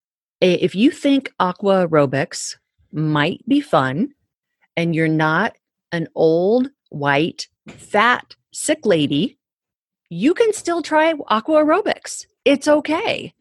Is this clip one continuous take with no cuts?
yes; 0 cuts

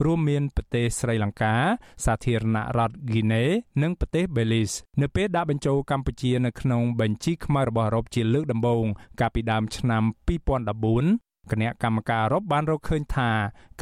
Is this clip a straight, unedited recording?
no; 1 cut; at 4.9 s

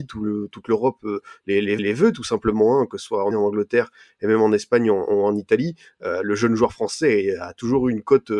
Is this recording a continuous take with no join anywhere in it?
no; 2 cuts; at 1.8 s, 3.3 s

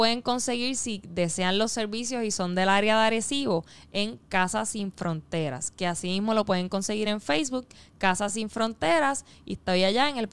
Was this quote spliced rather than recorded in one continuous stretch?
no; 0 cuts

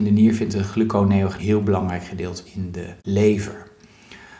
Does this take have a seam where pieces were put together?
yes; 3 cuts; at 1.4 s, 2.4 s, 3.0 s

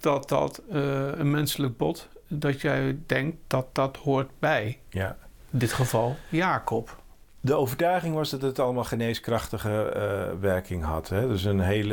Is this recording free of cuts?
yes; 0 cuts

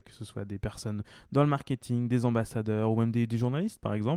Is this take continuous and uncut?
yes; 0 cuts

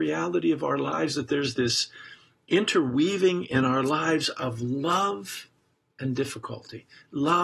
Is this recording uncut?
yes; 0 cuts

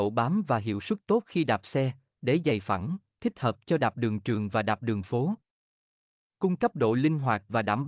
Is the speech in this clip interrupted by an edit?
no; 0 cuts

